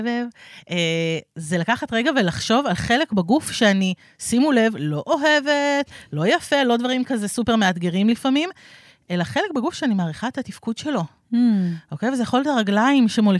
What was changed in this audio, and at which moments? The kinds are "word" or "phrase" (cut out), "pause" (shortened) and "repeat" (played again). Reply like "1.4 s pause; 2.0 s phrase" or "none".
none